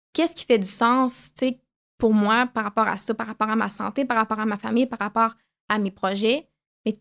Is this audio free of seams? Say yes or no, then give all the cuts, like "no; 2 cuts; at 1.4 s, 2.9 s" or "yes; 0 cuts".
yes; 0 cuts